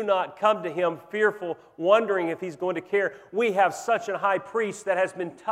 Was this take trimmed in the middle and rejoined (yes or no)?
no